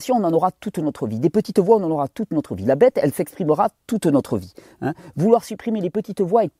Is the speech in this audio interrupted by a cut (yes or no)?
no